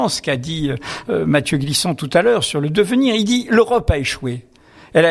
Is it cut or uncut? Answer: uncut